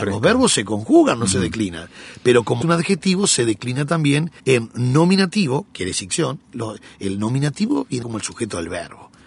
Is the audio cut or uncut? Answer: cut